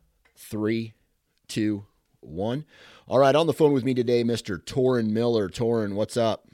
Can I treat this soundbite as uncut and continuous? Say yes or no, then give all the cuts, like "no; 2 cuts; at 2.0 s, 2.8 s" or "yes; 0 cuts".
yes; 0 cuts